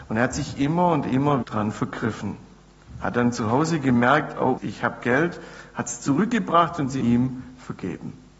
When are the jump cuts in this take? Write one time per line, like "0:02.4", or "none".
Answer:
0:01.4
0:04.6
0:07.0